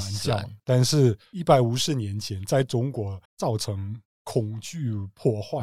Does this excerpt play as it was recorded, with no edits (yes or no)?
no